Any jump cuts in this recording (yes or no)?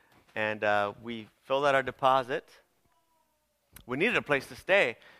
no